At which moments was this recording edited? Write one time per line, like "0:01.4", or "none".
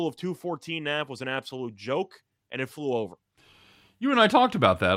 none